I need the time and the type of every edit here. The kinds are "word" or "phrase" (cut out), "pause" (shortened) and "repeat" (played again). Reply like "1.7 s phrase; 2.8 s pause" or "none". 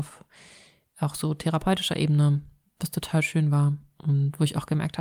none